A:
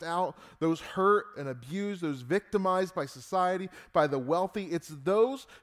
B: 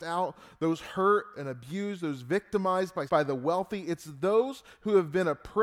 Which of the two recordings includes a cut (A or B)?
B